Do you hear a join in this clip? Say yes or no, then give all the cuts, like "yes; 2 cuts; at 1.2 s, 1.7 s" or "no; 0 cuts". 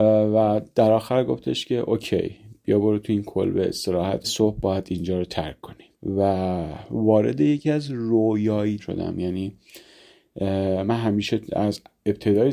yes; 3 cuts; at 4.2 s, 5.9 s, 8.8 s